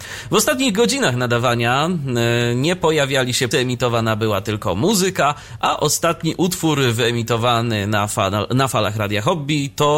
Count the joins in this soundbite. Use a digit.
1